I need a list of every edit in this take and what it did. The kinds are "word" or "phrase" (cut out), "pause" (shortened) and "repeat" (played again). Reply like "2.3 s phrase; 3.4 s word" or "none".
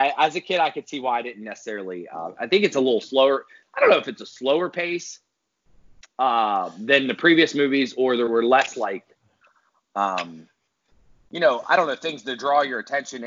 none